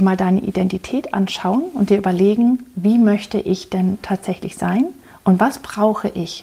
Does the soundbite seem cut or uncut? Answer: uncut